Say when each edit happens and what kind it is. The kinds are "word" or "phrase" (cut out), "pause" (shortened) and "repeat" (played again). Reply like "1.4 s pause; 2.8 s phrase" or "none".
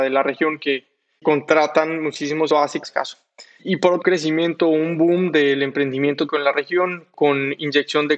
1.2 s word; 2.5 s phrase; 2.8 s phrase; 4.0 s phrase; 6.3 s word